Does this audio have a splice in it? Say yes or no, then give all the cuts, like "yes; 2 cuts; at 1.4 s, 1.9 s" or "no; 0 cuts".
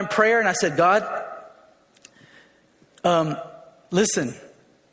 no; 0 cuts